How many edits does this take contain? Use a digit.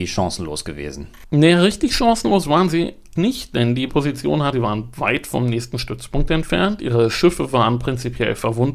3